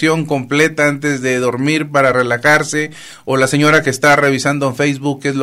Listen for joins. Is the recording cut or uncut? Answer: uncut